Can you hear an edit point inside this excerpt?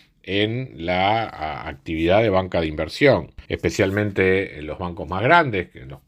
yes; 1 cut; at 3.4 s

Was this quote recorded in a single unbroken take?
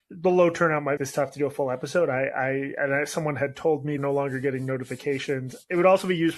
no; 2 cuts; at 1.0 s, 4.0 s

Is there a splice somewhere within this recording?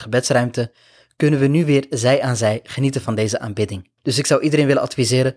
yes; 1 cut; at 4.0 s

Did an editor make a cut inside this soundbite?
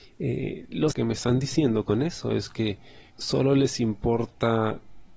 yes; 2 cuts; at 0.9 s, 3.1 s

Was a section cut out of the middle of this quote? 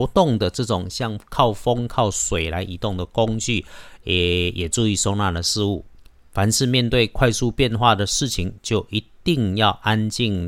no; 0 cuts

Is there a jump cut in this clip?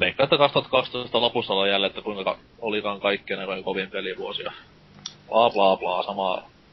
no; 0 cuts

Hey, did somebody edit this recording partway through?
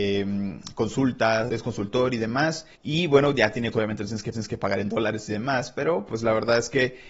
yes; 4 cuts; at 1.5 s, 2.7 s, 3.7 s, 4.3 s

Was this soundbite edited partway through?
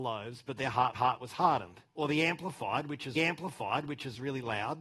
yes; 3 cuts; at 0.9 s, 1.9 s, 3.2 s

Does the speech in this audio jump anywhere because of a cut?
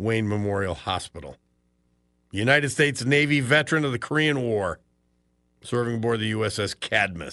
no; 0 cuts

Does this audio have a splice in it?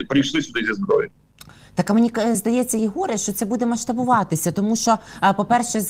no; 0 cuts

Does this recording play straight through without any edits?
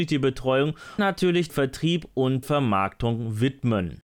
no; 3 cuts; at 1.0 s, 1.5 s, 2.4 s

